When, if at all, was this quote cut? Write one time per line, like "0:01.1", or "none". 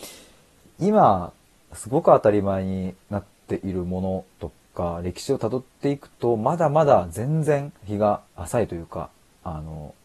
0:03.0
0:07.8
0:08.3